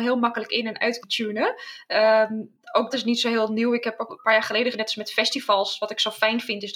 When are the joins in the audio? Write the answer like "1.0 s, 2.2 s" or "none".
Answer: 1.0 s, 2.9 s, 4.1 s, 4.7 s